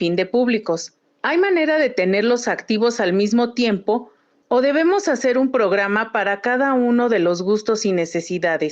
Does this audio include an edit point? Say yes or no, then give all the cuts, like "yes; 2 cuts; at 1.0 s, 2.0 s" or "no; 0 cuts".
no; 0 cuts